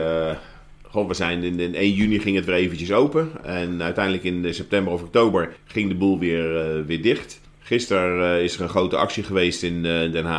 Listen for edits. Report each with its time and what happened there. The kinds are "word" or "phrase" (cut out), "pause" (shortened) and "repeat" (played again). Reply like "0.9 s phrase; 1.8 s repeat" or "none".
5.6 s pause; 7.4 s pause